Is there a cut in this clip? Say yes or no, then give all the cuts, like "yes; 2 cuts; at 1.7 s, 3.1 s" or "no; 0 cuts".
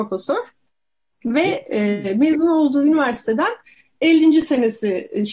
no; 0 cuts